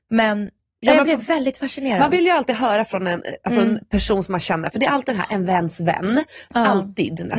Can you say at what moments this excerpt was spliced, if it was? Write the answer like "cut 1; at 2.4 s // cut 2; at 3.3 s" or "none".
none